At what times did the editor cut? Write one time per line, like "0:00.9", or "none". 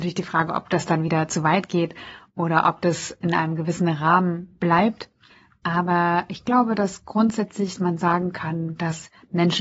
0:03.2